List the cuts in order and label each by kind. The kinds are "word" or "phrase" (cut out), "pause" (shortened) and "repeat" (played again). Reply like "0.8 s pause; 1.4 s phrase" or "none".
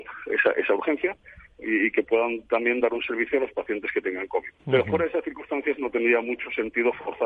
4.6 s pause